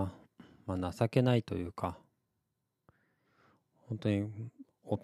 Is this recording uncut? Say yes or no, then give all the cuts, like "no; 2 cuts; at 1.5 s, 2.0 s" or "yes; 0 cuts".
yes; 0 cuts